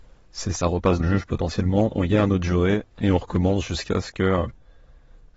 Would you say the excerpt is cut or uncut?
cut